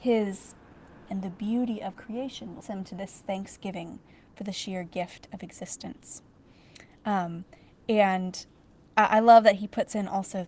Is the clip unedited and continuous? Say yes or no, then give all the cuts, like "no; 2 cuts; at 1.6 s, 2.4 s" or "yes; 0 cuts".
no; 2 cuts; at 1.1 s, 2.6 s